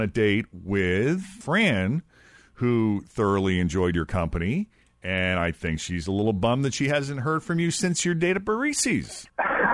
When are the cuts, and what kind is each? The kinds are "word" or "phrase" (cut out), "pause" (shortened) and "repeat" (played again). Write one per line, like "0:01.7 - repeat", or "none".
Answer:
none